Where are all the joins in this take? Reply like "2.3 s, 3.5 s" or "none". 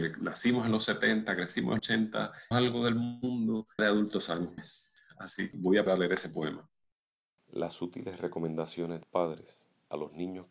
1.8 s, 2.5 s, 3.8 s, 4.6 s, 5.5 s, 5.9 s, 9.0 s